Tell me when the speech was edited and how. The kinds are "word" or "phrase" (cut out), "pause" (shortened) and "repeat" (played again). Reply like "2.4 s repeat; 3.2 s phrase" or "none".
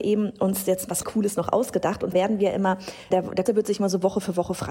1.0 s word; 2.1 s word; 3.1 s word; 3.5 s word